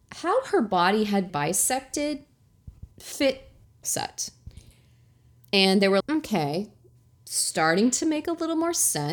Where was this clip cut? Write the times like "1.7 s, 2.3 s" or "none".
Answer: 1.3 s, 3.8 s, 6.0 s